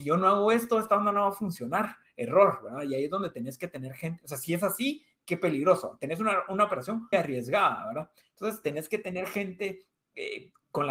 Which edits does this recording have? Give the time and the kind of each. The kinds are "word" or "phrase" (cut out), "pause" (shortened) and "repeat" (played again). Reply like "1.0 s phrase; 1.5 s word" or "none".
7.1 s word